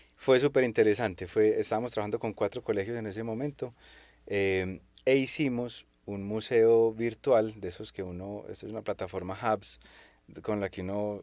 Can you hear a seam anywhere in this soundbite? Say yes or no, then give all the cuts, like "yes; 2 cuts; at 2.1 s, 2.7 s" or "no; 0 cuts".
no; 0 cuts